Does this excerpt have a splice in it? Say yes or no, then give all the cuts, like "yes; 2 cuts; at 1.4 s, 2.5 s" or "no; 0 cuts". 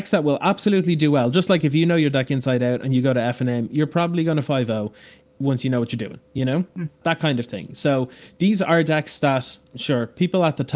no; 0 cuts